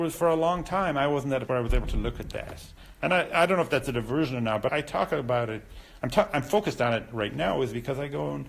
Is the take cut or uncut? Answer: cut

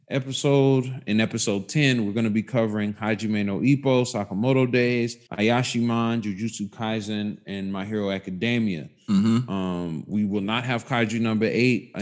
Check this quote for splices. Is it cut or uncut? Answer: cut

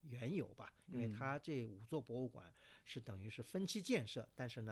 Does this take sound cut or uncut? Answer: uncut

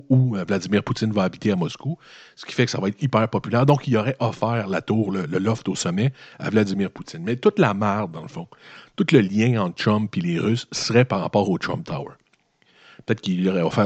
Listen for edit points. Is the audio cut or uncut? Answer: uncut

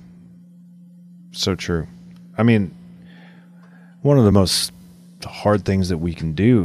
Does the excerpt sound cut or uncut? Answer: uncut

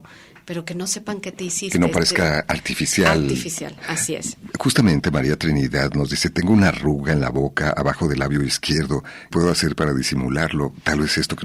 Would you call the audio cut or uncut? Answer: cut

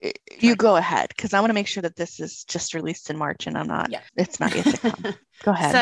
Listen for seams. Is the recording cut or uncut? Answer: cut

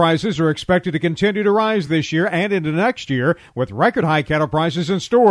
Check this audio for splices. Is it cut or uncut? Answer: uncut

